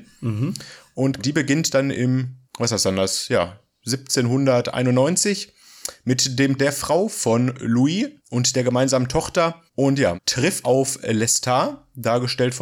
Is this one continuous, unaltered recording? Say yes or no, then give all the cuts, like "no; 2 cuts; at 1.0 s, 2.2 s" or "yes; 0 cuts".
no; 7 cuts; at 1.2 s, 2.4 s, 6.6 s, 8.2 s, 9.7 s, 10.2 s, 10.6 s